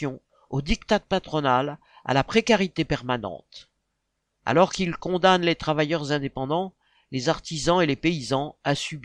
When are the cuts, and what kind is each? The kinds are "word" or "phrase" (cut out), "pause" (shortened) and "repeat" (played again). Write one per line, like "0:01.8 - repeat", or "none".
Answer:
none